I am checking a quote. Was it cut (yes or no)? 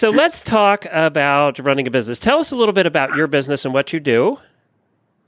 no